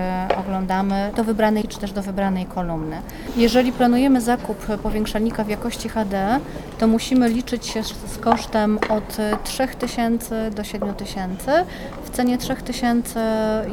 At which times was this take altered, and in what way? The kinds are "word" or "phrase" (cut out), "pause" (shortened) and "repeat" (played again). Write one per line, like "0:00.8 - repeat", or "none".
0:01.1 - word
0:01.6 - word